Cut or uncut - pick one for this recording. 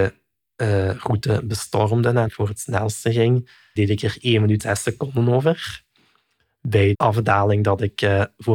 cut